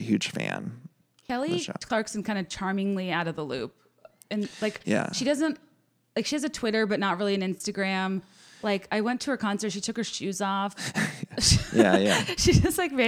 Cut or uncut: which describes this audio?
uncut